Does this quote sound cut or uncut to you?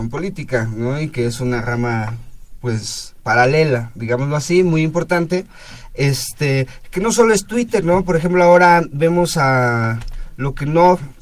uncut